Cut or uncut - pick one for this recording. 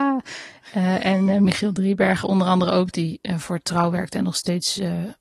uncut